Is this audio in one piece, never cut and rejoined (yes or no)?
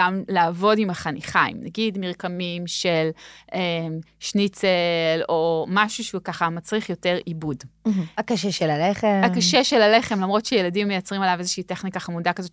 yes